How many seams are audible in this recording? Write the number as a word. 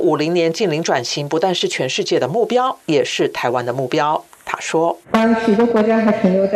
one